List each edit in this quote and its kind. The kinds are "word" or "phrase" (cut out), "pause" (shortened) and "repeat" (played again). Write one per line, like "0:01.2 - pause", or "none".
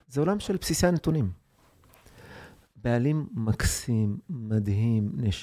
none